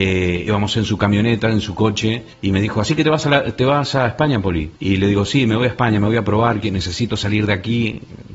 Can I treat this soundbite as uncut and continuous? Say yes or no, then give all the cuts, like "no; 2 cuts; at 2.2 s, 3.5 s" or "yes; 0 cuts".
no; 2 cuts; at 2.3 s, 4.8 s